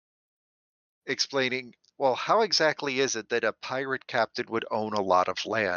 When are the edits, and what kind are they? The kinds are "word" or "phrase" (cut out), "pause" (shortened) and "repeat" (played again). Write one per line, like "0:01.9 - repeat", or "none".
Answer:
none